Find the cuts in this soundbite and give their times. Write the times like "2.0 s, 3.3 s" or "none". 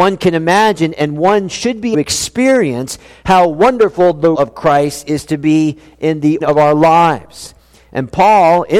1.9 s, 4.3 s, 6.4 s